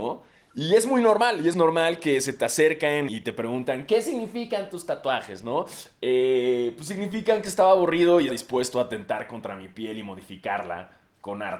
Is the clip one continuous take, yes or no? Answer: no